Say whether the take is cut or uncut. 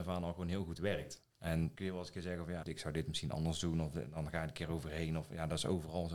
cut